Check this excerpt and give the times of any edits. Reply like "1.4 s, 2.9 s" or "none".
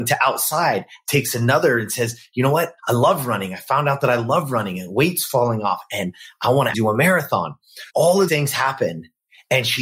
1.1 s, 2.8 s, 6.7 s, 7.9 s, 8.3 s